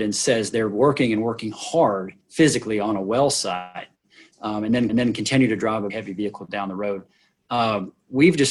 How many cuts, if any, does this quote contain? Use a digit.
3